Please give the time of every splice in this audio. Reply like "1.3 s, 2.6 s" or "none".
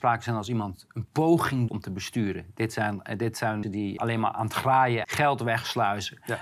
1.7 s, 3.6 s, 4.0 s, 5.0 s